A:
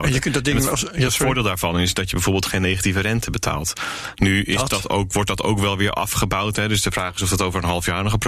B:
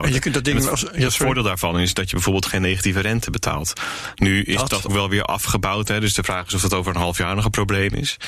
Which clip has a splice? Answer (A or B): B